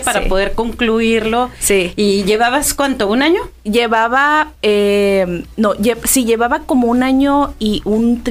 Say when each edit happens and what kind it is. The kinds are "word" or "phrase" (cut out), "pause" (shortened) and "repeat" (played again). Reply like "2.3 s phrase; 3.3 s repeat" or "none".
4.6 s pause